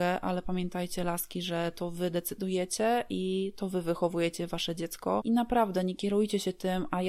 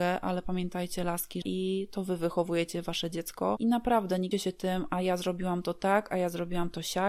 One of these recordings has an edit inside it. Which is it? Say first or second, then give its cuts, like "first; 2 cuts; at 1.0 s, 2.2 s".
second; 2 cuts; at 1.4 s, 4.3 s